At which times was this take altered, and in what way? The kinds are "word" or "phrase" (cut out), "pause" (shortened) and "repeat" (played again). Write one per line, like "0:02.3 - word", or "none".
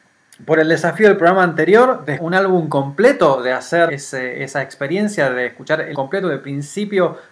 0:02.2 - word
0:03.9 - word
0:05.9 - word